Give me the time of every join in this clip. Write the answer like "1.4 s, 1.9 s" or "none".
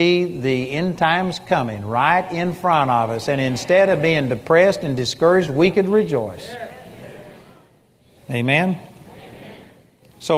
none

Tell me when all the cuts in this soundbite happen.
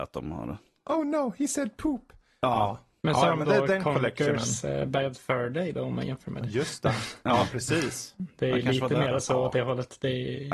none

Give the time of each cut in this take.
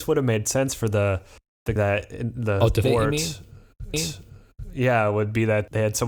1.8 s, 2.8 s, 3.9 s

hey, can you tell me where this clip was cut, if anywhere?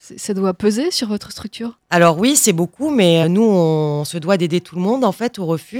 3.2 s

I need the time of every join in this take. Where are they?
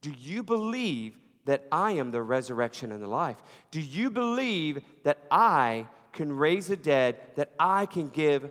none

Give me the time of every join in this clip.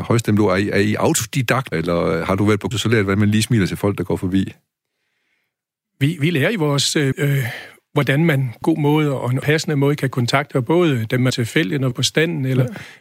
1.7 s, 2.7 s, 7.1 s, 8.6 s, 9.4 s, 10.5 s, 11.3 s, 11.9 s

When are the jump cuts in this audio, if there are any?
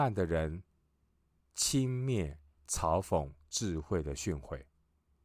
none

